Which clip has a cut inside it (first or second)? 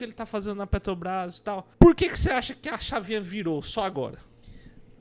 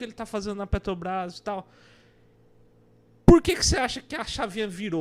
first